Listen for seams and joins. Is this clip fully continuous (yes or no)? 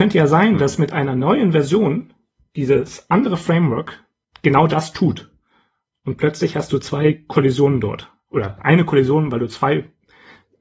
yes